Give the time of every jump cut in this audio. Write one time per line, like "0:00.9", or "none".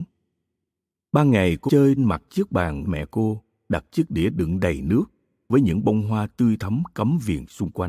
0:01.7
0:02.0
0:02.9